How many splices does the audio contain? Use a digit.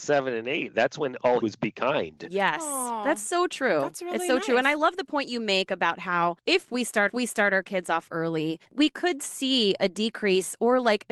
3